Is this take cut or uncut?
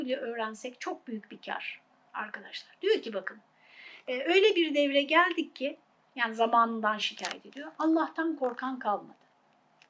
uncut